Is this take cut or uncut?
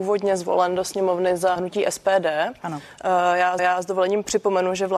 cut